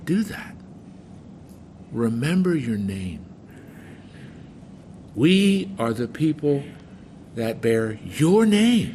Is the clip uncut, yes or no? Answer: yes